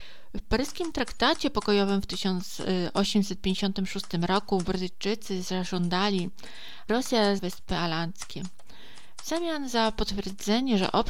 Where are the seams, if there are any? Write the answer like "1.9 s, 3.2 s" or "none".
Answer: 6.9 s, 7.4 s